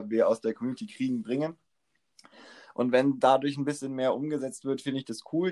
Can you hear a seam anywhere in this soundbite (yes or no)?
no